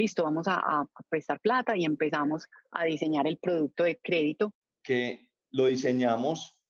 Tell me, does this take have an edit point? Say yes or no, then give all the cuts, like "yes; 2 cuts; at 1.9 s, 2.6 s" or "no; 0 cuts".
no; 0 cuts